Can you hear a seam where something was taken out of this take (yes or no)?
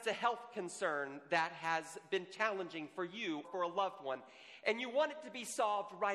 yes